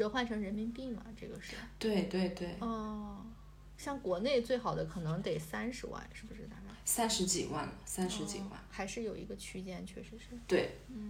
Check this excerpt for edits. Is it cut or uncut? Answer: uncut